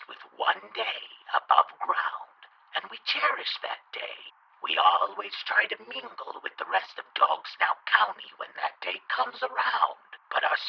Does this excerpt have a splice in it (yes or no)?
no